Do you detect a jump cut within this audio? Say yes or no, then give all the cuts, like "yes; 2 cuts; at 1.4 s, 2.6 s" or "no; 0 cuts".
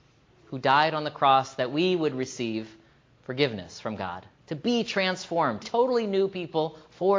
yes; 2 cuts; at 4.3 s, 5.6 s